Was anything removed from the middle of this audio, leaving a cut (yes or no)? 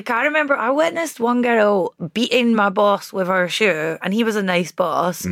no